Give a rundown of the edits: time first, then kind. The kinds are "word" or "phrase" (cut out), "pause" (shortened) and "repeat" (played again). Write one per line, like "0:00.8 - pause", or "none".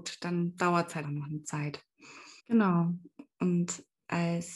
0:01.0 - word
0:02.4 - pause